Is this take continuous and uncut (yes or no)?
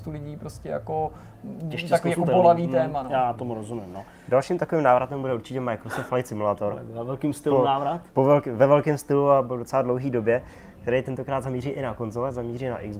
yes